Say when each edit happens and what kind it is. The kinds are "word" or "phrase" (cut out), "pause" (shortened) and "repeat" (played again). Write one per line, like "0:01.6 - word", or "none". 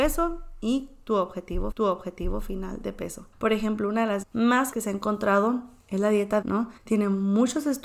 0:01.7 - repeat
0:03.3 - pause
0:04.2 - word
0:04.7 - word
0:06.4 - word
0:06.8 - pause